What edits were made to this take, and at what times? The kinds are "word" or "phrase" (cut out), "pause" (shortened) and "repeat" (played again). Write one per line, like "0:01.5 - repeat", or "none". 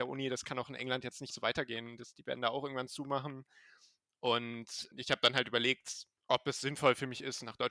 0:01.3 - word
0:04.9 - word
0:06.2 - pause